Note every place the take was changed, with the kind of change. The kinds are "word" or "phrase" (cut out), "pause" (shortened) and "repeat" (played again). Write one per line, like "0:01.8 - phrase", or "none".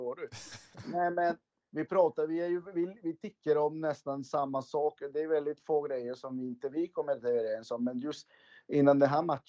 none